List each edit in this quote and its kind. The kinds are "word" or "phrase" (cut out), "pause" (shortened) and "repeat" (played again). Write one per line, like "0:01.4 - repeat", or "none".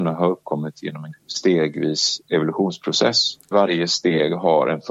0:01.1 - word
0:03.5 - word